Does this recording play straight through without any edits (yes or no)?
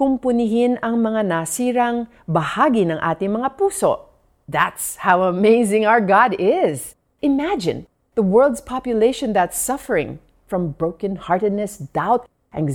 yes